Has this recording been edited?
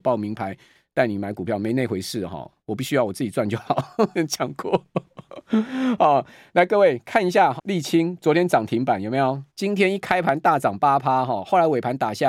yes; 4 cuts; at 2.6 s, 4.1 s, 7.6 s, 9.5 s

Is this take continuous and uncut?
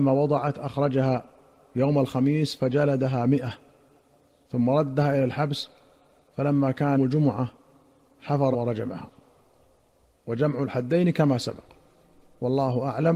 no; 2 cuts; at 7.0 s, 8.5 s

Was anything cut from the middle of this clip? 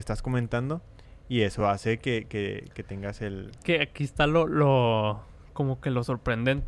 no; 0 cuts

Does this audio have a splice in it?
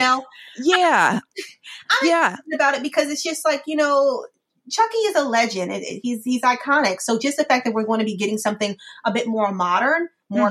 no; 0 cuts

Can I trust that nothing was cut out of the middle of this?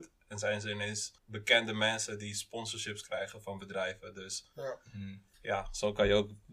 no; 2 cuts; at 1.2 s, 5.3 s

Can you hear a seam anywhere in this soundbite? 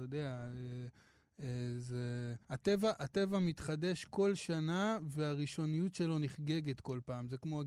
yes; 1 cut; at 2.4 s

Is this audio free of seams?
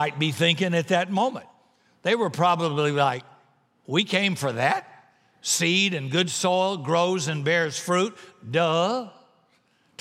yes; 0 cuts

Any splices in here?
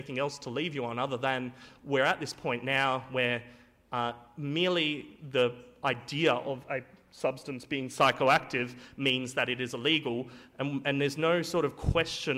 no; 0 cuts

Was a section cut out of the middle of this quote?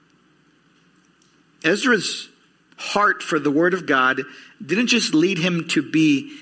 no; 0 cuts

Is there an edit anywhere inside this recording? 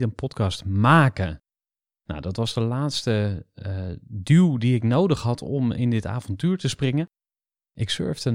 no; 0 cuts

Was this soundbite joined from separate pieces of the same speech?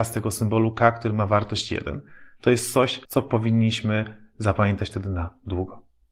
yes; 1 cut; at 3.1 s

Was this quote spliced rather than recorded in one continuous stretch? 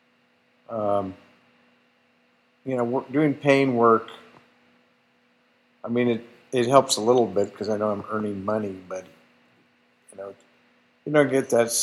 no; 0 cuts

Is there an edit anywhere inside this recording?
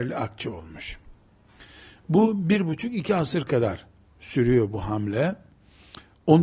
no; 0 cuts

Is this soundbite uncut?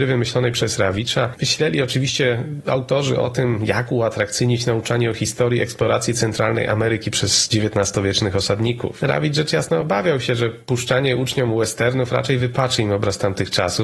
yes; 0 cuts

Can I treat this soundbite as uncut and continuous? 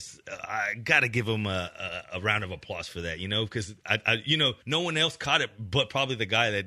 no; 1 cut; at 4.6 s

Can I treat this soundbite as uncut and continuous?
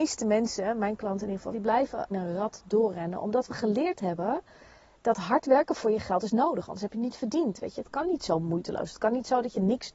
no; 2 cuts; at 1.5 s, 2.1 s

